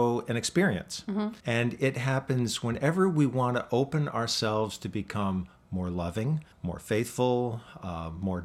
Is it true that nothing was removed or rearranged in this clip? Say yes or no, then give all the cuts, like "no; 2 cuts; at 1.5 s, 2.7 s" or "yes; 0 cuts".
no; 2 cuts; at 1.4 s, 6.5 s